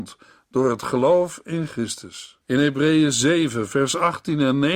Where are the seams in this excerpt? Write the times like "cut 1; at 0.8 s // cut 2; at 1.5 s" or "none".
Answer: cut 1; at 2.4 s